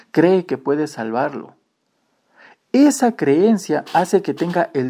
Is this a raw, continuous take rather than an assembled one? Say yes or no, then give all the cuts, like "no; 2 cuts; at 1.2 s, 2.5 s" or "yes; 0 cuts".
yes; 0 cuts